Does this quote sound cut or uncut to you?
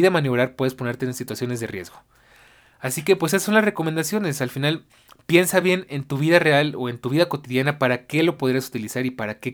uncut